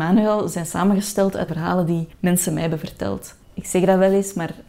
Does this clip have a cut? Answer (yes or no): yes